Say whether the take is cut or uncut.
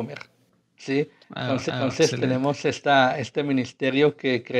cut